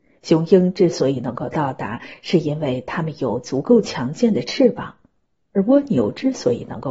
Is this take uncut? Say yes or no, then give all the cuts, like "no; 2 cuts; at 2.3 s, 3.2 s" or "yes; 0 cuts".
yes; 0 cuts